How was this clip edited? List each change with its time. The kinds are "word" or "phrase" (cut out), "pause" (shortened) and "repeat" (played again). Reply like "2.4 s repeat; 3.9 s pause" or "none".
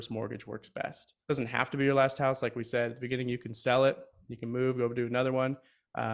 1.2 s pause